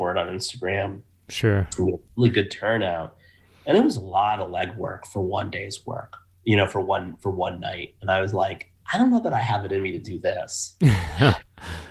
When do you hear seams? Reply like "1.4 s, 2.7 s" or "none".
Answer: none